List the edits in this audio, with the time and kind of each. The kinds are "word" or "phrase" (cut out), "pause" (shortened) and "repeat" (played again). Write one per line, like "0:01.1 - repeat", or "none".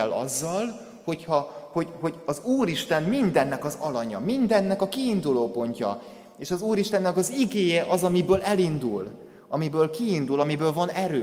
none